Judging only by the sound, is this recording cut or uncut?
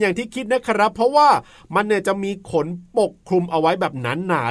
uncut